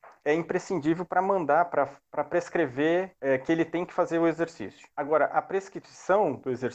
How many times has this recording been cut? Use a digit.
2